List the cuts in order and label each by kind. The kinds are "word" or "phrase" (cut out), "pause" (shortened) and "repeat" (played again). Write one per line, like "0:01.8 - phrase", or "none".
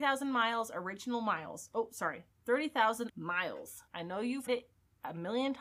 0:03.1 - word
0:03.9 - pause
0:04.5 - word